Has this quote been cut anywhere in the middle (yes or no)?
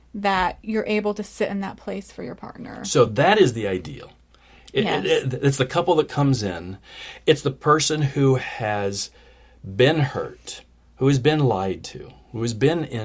no